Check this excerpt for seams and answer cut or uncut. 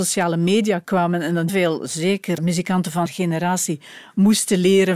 cut